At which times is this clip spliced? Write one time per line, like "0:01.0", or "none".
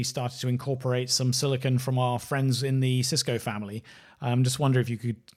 none